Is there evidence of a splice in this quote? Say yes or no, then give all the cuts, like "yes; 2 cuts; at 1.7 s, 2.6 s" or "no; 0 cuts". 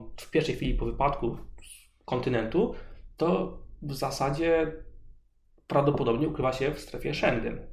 no; 0 cuts